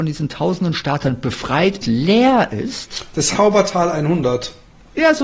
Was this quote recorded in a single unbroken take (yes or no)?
no